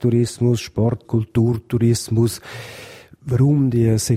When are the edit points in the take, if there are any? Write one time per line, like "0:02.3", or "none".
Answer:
0:01.0